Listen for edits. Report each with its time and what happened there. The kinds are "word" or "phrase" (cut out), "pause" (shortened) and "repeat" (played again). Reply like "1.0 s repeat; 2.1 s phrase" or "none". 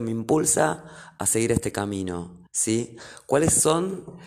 2.5 s pause